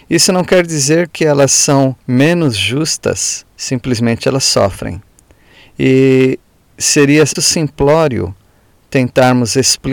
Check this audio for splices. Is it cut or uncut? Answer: cut